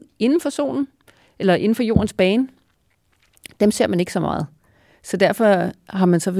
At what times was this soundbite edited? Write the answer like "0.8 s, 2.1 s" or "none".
none

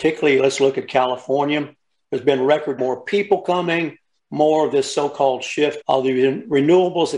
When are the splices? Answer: 2.8 s, 5.8 s

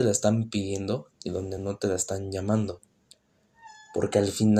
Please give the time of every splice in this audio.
none

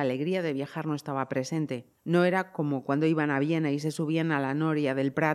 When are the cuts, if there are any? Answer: 2.0 s

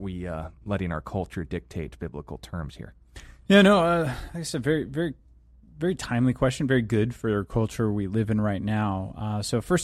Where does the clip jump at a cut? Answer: none

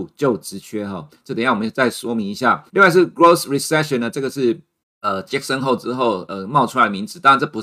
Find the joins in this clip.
2.7 s, 4.8 s

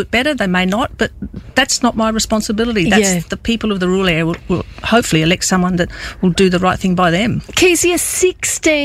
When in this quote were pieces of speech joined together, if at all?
none

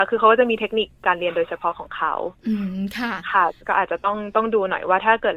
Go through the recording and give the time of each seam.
3.6 s

